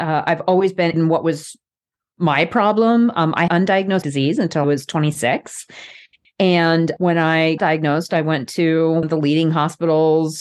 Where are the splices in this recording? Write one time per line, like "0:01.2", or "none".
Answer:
0:00.9
0:03.5
0:04.0
0:04.6
0:07.6
0:09.0